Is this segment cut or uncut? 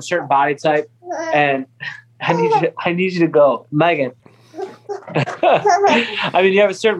cut